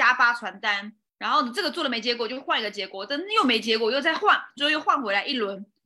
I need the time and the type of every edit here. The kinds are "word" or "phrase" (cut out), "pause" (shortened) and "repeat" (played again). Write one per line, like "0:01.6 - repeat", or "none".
0:01.1 - pause

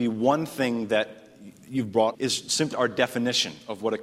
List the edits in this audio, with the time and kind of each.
0:02.1 - phrase
0:02.7 - word

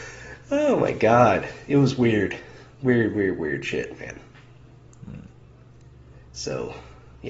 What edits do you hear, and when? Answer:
0:06.3 - pause

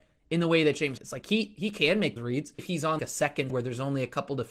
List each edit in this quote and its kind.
0:01.0 - word
0:02.2 - word
0:02.6 - word
0:03.0 - word
0:03.5 - word

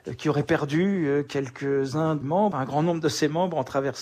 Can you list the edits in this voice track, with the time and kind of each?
0:02.2 - word
0:02.5 - word

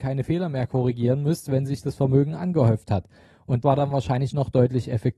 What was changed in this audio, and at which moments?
0:03.6 - word

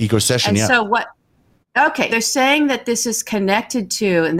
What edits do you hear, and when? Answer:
0:02.1 - word

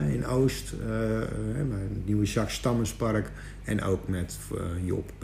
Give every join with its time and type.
none

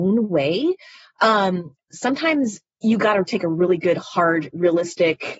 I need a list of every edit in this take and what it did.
0:01.9 - word

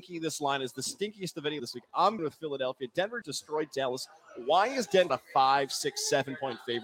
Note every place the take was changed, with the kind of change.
0:01.6 - word
0:02.2 - word
0:03.2 - word
0:05.1 - word

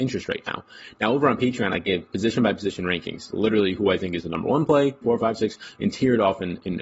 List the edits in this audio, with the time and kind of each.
0:05.0 - phrase

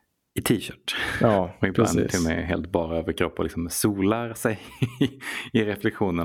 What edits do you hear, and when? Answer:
none

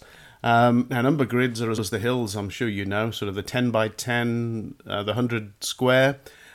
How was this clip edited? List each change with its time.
0:01.8 - word

